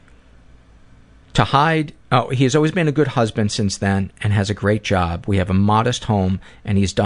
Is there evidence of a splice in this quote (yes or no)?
yes